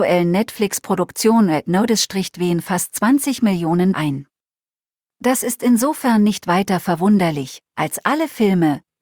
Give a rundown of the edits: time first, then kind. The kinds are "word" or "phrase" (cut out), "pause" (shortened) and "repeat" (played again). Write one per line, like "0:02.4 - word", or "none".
0:03.9 - word